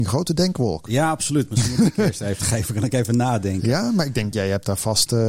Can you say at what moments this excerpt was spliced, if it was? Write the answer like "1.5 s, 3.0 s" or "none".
2.4 s